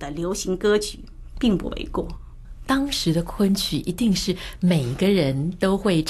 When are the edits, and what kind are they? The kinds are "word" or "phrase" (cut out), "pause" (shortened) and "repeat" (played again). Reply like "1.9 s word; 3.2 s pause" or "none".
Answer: 2.6 s phrase